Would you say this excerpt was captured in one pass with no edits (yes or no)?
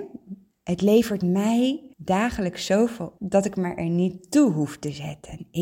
no